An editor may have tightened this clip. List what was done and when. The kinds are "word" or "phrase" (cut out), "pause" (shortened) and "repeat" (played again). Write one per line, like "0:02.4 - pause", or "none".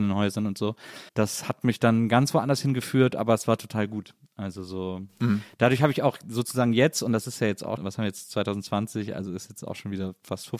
0:01.1 - pause
0:07.8 - word